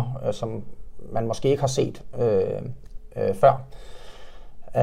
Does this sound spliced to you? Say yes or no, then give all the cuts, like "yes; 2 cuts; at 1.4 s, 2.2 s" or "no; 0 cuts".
no; 0 cuts